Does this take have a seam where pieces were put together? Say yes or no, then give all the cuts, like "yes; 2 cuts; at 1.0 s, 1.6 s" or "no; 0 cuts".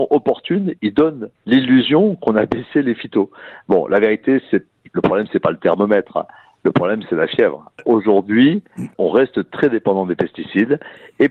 yes; 1 cut; at 8.9 s